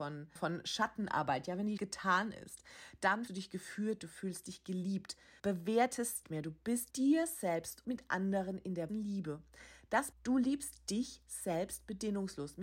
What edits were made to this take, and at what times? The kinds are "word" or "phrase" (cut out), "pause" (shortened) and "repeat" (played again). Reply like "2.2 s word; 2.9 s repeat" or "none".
1.8 s word; 3.3 s word; 5.4 s word; 6.2 s word; 6.9 s word; 7.8 s word; 8.9 s word; 10.1 s word